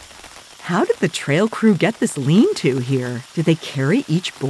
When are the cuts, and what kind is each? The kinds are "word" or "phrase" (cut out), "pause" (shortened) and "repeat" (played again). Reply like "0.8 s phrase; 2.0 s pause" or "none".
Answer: 3.3 s pause

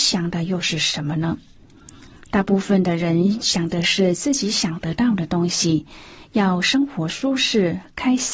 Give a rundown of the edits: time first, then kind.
none

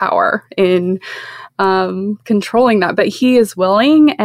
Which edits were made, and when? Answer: none

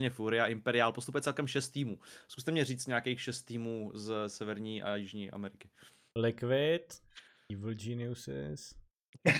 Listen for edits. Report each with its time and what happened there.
none

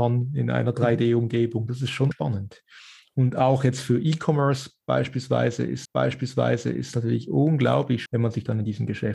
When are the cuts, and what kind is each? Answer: 2.1 s word; 5.9 s repeat; 8.1 s word

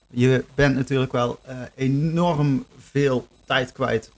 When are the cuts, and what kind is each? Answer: none

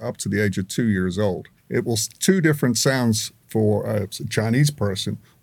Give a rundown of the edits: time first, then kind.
1.6 s pause

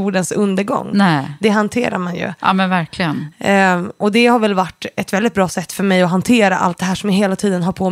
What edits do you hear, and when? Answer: none

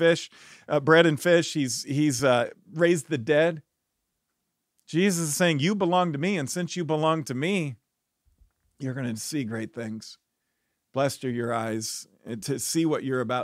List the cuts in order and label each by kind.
none

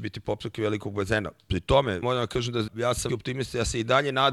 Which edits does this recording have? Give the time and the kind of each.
2.0 s word; 2.7 s word; 3.1 s word

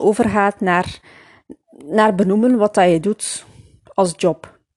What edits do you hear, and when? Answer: none

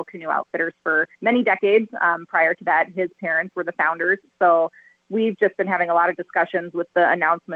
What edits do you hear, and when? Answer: 1.1 s pause

